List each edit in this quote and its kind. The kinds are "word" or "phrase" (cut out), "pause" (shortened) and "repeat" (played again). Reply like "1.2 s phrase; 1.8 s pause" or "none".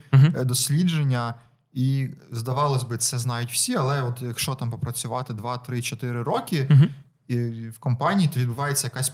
none